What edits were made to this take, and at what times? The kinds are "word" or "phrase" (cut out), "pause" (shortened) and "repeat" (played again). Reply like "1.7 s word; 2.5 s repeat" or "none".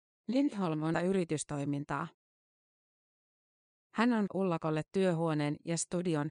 0.9 s phrase; 4.3 s phrase